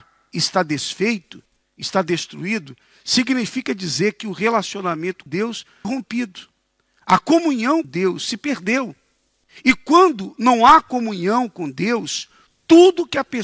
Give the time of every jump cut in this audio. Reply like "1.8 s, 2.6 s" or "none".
5.3 s, 5.8 s, 7.8 s